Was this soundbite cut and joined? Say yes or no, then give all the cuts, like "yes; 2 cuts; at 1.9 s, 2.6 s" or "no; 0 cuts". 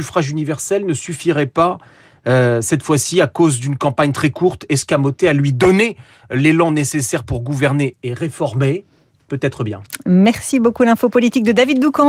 no; 0 cuts